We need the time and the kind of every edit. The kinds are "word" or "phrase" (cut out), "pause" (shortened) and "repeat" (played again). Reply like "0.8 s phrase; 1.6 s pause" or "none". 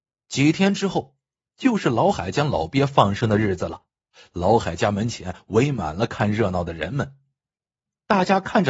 none

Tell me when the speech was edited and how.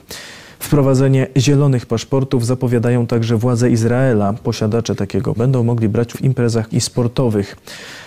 5.4 s word; 6.1 s word; 6.7 s word

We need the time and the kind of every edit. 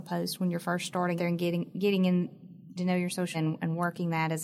1.2 s word; 2.8 s word; 3.3 s word

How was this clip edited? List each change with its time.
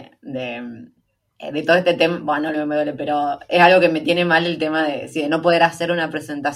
2.5 s word

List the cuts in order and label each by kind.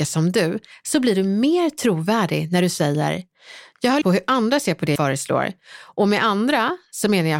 4.0 s word; 5.0 s word

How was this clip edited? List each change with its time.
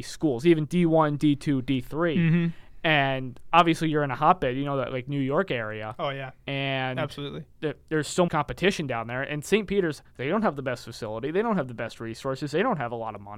7.5 s pause; 8.3 s word

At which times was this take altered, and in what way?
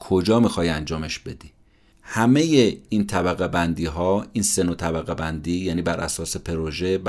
none

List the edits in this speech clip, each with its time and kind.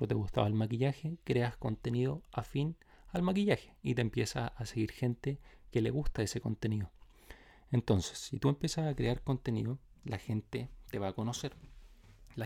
none

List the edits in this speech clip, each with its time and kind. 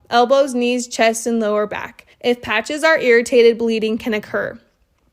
2.1 s pause

